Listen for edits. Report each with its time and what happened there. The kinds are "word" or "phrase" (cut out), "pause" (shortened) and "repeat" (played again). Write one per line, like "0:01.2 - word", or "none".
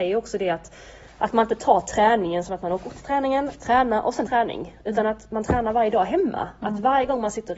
0:01.0 - pause
0:04.3 - phrase